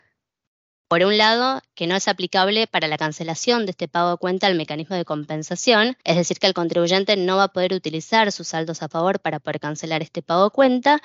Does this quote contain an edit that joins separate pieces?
yes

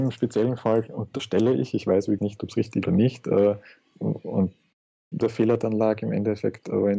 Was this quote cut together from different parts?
yes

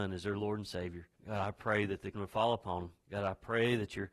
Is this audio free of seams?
no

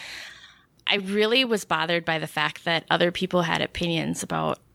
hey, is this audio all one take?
yes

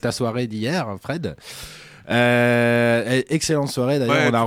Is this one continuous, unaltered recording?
yes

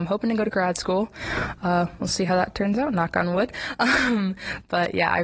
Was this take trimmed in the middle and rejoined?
no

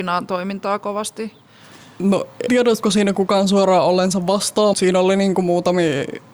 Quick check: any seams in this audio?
yes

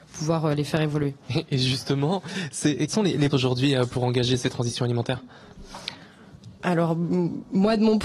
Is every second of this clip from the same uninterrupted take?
no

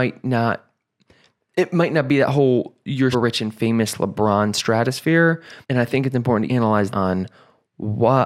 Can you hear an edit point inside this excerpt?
yes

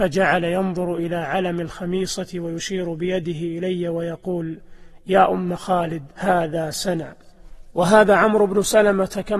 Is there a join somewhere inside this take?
no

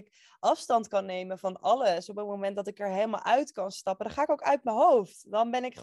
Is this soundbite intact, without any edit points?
yes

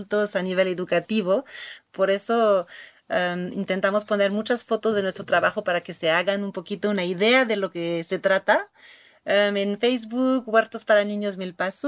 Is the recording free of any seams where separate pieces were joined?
yes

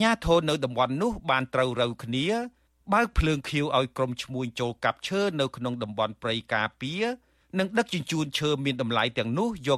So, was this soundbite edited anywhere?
no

